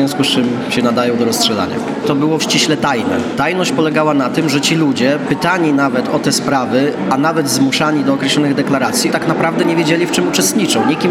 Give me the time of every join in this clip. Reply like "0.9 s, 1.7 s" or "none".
2.4 s, 9.1 s